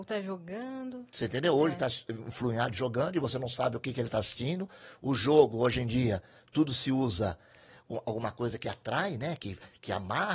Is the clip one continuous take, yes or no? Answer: yes